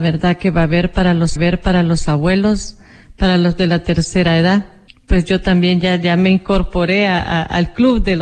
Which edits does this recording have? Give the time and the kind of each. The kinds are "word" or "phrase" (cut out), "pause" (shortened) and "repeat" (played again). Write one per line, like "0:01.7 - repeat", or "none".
0:01.4 - repeat
0:04.9 - pause